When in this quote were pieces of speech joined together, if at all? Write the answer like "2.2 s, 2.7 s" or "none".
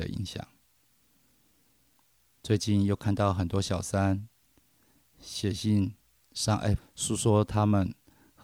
6.8 s